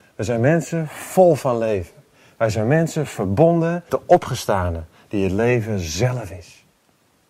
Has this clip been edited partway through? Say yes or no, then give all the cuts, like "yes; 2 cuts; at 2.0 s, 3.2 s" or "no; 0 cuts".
yes; 1 cut; at 3.9 s